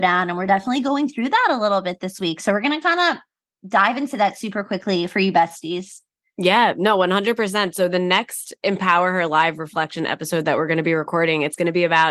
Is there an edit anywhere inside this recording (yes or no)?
no